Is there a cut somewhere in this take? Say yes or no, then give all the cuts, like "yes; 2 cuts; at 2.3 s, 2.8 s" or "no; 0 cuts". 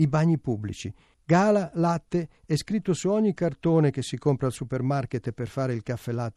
no; 0 cuts